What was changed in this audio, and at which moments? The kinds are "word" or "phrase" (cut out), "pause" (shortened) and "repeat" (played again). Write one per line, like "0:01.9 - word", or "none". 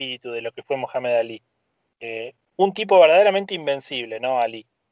none